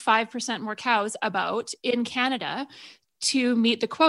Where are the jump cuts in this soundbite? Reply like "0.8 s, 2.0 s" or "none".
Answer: 1.8 s